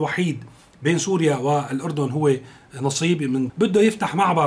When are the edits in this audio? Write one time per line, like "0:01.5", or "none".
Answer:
0:03.5